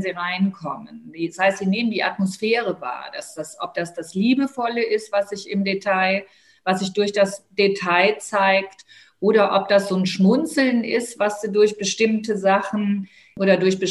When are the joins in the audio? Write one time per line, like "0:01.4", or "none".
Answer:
none